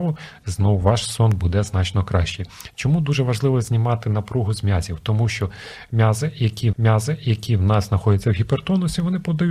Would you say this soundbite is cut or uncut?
cut